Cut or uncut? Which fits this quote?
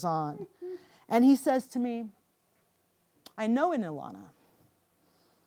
cut